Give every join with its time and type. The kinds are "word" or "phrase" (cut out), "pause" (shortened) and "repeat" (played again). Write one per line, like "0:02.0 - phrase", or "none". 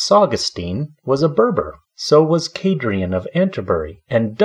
0:01.8 - pause